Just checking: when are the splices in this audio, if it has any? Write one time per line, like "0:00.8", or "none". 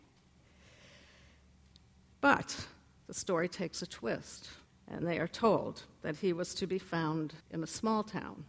0:04.7
0:07.4